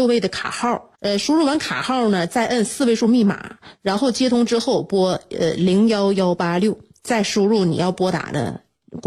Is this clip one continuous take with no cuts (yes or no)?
no